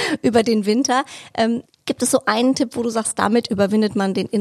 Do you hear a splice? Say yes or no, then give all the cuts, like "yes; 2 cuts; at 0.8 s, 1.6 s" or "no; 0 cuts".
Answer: no; 0 cuts